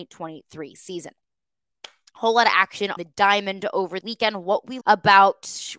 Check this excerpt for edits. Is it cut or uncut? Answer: cut